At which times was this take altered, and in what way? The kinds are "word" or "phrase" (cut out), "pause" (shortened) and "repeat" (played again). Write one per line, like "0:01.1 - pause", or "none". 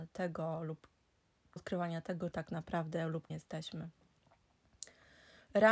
0:01.6 - word
0:02.3 - word
0:03.3 - word